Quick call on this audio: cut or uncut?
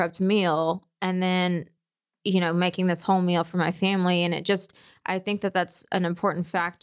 uncut